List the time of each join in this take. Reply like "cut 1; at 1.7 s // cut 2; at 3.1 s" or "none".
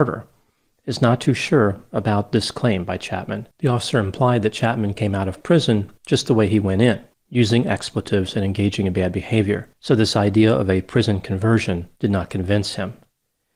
cut 1; at 3.5 s // cut 2; at 6.0 s // cut 3; at 7.1 s // cut 4; at 9.7 s // cut 5; at 12.0 s